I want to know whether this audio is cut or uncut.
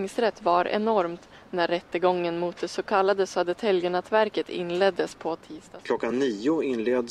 uncut